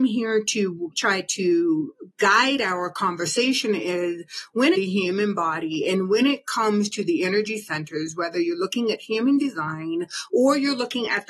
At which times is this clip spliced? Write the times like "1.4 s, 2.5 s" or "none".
0.9 s, 4.7 s